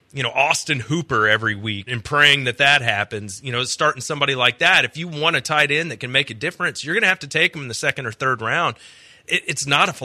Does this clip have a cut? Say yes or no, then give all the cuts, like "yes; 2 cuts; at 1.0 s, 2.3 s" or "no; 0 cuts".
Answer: yes; 1 cut; at 1.9 s